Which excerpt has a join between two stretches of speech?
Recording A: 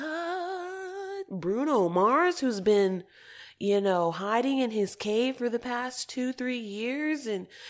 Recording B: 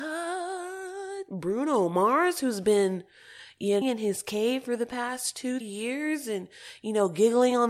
B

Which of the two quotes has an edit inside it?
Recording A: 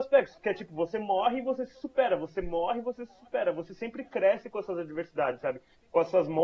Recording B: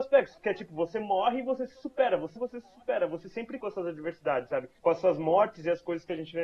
B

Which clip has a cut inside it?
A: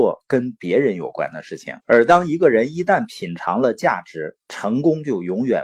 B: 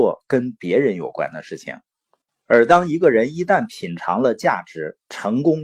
A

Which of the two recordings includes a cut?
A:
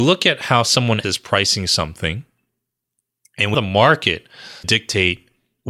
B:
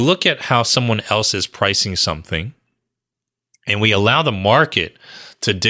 A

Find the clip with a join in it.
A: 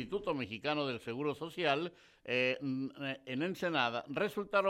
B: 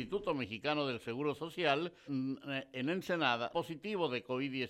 B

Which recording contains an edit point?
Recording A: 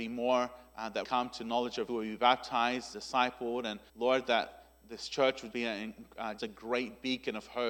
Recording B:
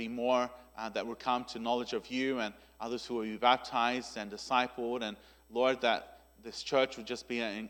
A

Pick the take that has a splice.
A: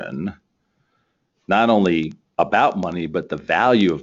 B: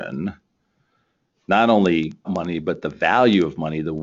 B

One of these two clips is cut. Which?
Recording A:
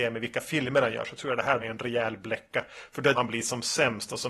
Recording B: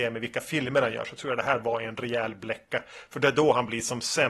A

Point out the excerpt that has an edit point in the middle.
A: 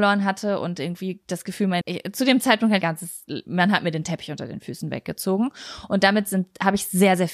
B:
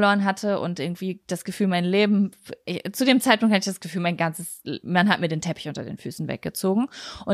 A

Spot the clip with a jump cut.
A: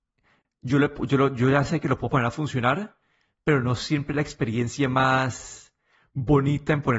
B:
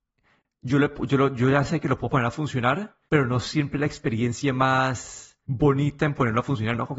B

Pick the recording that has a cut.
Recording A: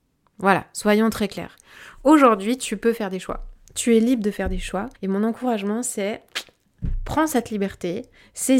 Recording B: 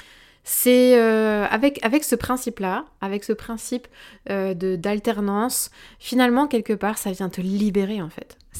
A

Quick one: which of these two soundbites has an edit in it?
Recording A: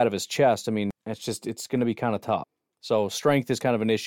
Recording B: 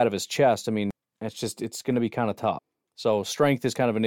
A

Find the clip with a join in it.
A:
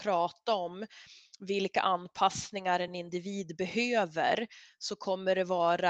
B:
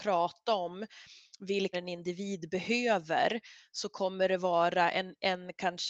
B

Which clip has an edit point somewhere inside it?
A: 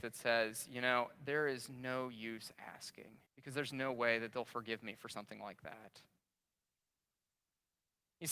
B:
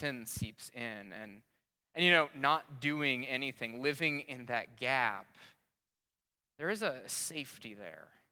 A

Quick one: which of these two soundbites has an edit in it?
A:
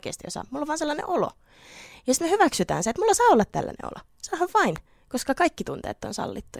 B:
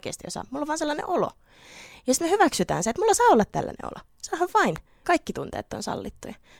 B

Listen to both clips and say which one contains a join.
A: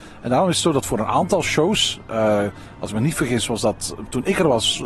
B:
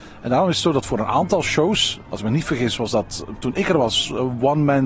B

